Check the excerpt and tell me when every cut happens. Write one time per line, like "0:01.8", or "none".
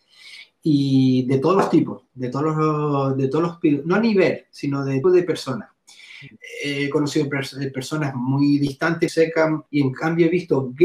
0:05.0
0:09.1
0:09.7

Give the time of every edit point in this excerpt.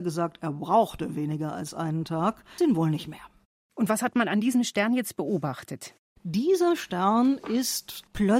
0:02.6

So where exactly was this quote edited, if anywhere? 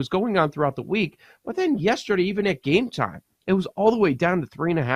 none

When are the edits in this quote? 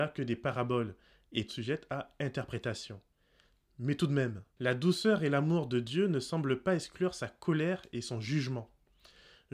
0:01.5
0:04.5

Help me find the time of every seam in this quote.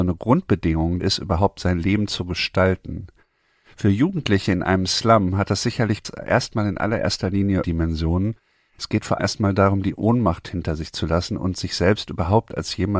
0:01.0
0:07.6
0:09.2

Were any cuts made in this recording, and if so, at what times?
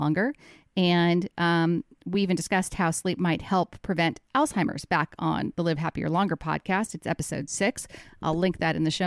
none

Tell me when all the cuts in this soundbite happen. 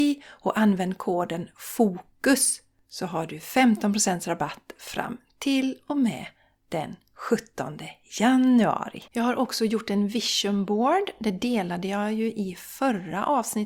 0:09.1

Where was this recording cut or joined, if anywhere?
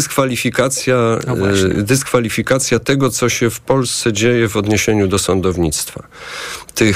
none

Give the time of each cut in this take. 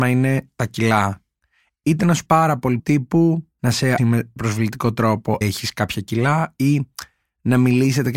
0:02.3
0:02.8
0:04.0
0:04.4
0:05.4

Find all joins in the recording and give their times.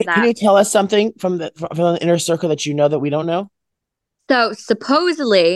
none

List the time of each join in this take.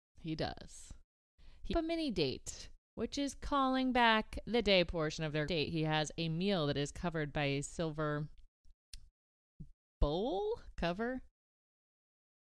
0:01.7
0:02.8
0:05.5
0:09.9

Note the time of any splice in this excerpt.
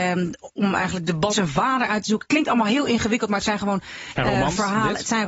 0:01.3
0:04.2

